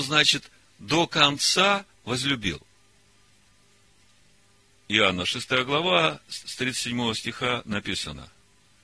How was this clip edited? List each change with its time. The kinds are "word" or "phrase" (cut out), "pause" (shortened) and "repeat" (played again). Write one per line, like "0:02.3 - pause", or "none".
0:01.9 - pause
0:06.4 - repeat